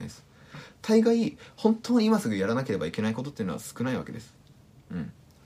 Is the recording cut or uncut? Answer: uncut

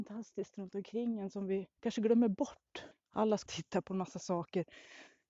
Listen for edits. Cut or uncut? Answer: cut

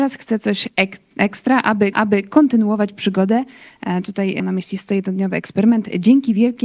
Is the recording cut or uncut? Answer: cut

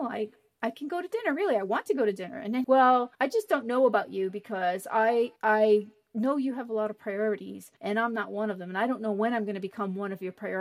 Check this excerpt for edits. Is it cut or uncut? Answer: cut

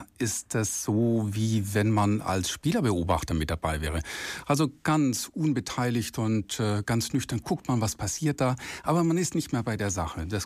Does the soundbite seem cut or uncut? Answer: uncut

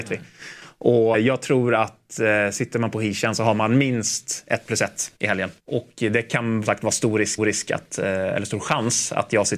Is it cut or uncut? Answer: cut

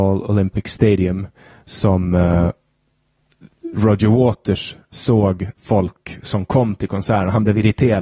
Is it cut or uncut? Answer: uncut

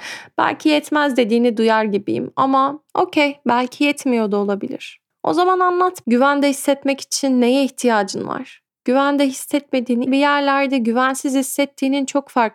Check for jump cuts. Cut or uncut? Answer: cut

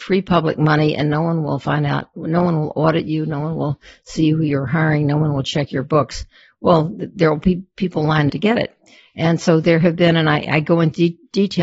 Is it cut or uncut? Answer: cut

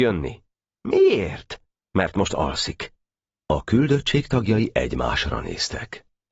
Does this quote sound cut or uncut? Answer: uncut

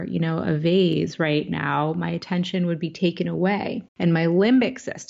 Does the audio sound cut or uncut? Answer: cut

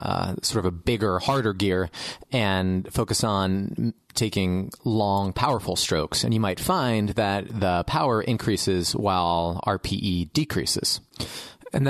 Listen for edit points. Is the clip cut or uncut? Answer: uncut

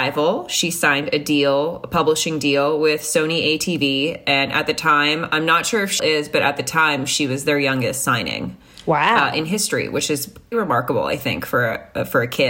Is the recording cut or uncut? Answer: cut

